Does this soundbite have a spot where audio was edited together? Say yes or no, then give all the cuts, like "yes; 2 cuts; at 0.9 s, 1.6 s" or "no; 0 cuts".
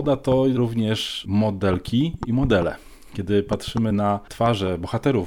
no; 0 cuts